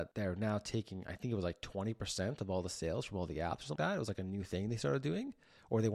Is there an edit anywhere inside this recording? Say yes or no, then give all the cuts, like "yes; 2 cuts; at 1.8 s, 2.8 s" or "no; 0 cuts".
yes; 1 cut; at 3.8 s